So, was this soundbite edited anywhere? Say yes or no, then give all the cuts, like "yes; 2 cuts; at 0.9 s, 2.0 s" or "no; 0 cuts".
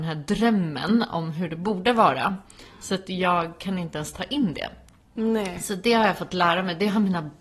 no; 0 cuts